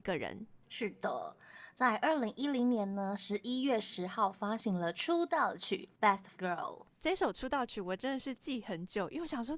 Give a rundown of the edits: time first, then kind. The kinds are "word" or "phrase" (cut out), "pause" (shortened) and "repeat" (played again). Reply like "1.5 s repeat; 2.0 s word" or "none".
6.4 s word